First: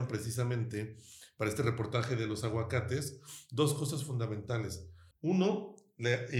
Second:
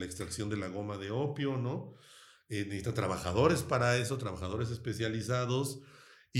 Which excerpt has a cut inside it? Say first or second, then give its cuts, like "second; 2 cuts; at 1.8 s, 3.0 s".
first; 1 cut; at 5.1 s